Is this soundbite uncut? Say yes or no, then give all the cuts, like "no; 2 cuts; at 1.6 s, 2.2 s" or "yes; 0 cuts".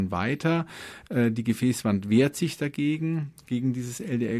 yes; 0 cuts